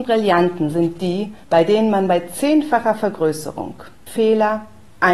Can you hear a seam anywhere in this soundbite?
yes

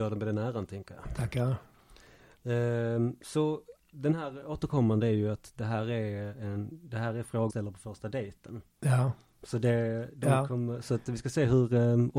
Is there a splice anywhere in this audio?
yes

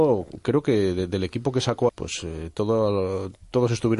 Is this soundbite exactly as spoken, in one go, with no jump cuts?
no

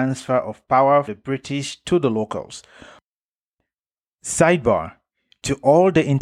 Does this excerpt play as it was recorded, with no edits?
no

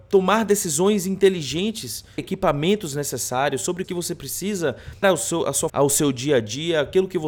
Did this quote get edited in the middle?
yes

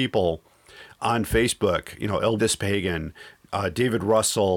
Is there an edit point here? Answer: yes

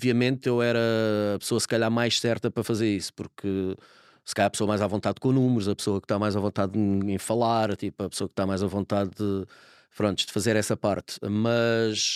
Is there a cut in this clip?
no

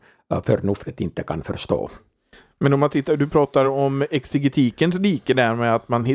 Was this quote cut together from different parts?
no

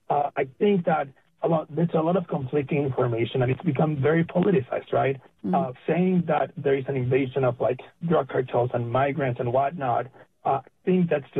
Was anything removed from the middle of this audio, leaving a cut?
yes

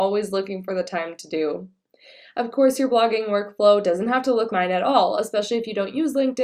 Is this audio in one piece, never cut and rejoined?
no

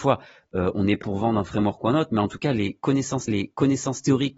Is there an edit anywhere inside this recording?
yes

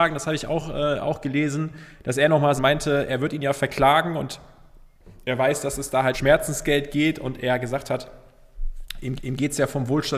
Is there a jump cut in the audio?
yes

